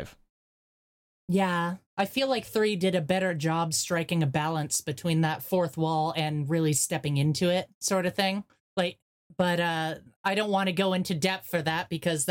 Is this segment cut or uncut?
cut